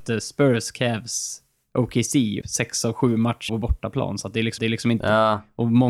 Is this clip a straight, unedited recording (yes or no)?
no